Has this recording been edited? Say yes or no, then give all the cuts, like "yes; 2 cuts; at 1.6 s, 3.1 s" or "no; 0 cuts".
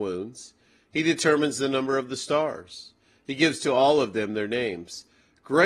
no; 0 cuts